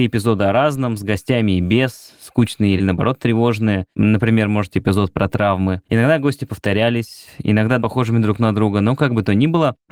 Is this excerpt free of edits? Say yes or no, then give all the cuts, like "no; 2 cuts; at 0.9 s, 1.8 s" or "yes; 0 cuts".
no; 5 cuts; at 2.8 s, 3.9 s, 4.7 s, 5.8 s, 7.8 s